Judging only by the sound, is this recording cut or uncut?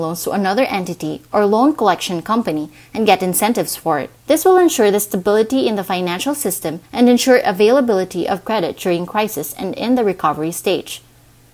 cut